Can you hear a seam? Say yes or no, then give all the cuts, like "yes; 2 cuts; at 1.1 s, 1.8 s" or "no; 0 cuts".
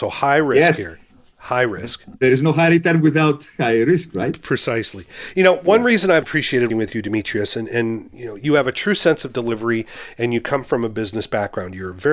yes; 2 cuts; at 6.2 s, 6.7 s